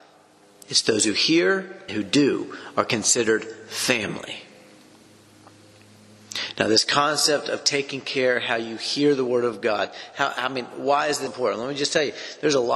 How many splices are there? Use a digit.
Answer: 2